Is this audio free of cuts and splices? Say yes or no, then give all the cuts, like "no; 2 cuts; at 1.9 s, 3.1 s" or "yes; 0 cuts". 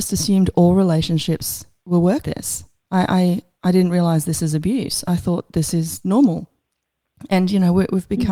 no; 2 cuts; at 2.2 s, 2.8 s